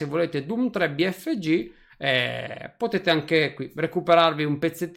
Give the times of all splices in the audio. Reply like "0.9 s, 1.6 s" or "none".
none